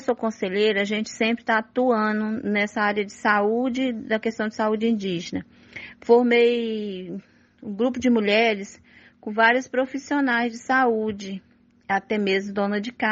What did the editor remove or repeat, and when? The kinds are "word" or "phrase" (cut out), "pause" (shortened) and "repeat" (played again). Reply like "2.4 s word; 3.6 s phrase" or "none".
none